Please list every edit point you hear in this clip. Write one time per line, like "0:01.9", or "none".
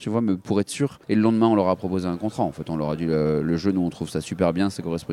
0:01.0